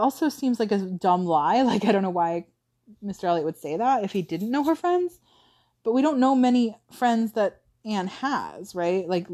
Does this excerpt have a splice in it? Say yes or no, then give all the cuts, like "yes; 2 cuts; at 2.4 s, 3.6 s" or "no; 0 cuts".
no; 0 cuts